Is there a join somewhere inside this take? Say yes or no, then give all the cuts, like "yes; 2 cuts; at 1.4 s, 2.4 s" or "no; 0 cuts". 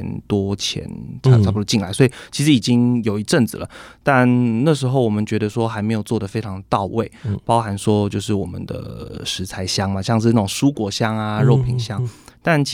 no; 0 cuts